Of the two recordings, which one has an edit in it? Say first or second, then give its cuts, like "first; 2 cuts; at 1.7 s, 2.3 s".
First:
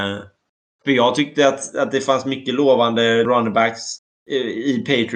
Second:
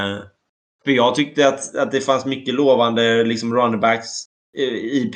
first; 1 cut; at 3.2 s